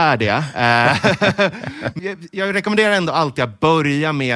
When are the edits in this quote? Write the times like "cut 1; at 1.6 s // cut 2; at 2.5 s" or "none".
cut 1; at 2.0 s